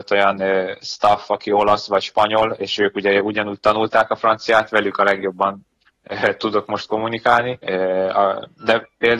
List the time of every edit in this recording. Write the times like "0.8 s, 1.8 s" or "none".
none